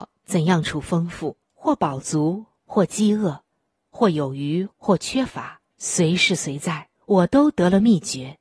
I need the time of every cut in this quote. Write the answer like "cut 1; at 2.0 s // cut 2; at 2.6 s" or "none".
cut 1; at 1.4 s // cut 2; at 3.5 s // cut 3; at 4.7 s // cut 4; at 5.7 s // cut 5; at 7.0 s